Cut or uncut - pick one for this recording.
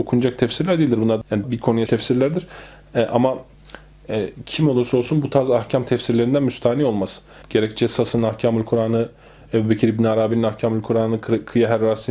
cut